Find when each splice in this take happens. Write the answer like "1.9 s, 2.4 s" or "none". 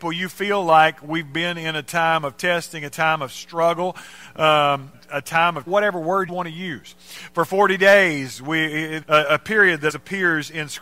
4.9 s, 5.7 s, 6.3 s, 9.0 s, 9.9 s